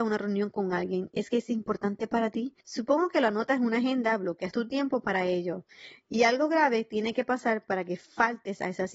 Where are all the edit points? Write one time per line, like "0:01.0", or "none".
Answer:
0:02.6